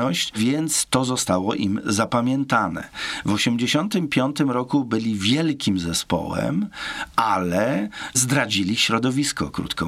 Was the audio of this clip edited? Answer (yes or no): no